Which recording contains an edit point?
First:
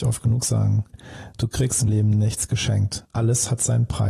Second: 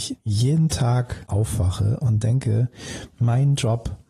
first; 1 cut; at 1.9 s

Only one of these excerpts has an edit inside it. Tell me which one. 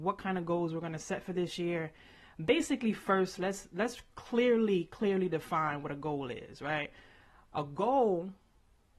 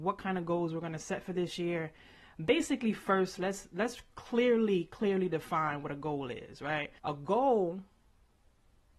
second; 1 cut; at 7.0 s

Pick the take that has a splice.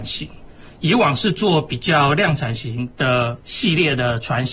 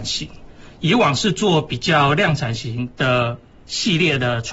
first; 1 cut; at 3.4 s

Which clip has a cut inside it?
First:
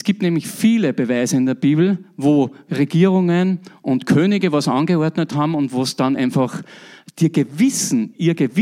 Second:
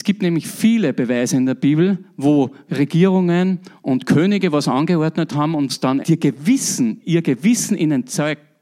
second; 2 cuts; at 5.7 s, 6.0 s

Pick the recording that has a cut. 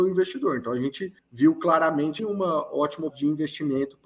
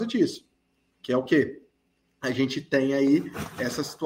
first; 3 cuts; at 1.2 s, 2.2 s, 3.1 s

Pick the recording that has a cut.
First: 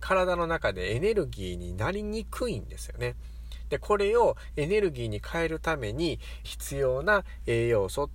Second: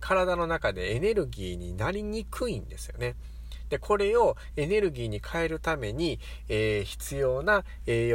first; 1 cut; at 6.4 s

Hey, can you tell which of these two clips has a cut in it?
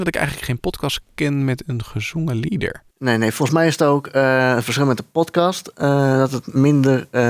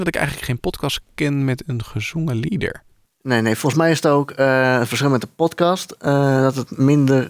first; 1 cut; at 2.9 s

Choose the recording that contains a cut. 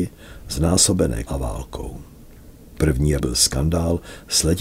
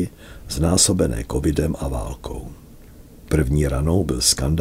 first; 2 cuts; at 1.3 s, 3.2 s

